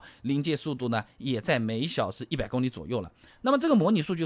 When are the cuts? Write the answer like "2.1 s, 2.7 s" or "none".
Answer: none